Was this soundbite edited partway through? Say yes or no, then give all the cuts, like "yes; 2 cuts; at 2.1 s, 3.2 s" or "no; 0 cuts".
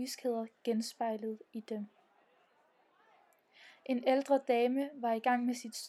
no; 0 cuts